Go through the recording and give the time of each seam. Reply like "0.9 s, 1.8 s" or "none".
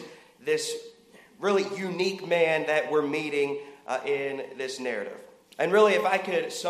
none